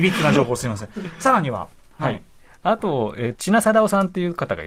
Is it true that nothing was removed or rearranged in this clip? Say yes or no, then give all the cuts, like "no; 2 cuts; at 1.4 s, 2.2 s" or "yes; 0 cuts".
no; 1 cut; at 3.3 s